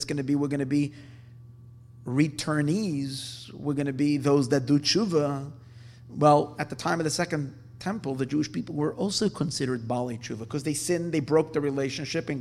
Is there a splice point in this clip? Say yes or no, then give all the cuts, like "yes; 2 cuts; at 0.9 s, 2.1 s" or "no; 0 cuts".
no; 0 cuts